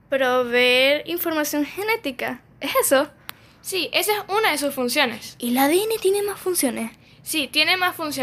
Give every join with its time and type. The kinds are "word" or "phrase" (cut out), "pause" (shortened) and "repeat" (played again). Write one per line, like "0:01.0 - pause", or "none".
none